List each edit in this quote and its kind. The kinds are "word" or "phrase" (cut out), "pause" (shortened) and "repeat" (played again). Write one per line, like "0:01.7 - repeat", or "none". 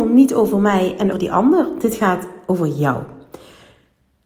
0:01.1 - word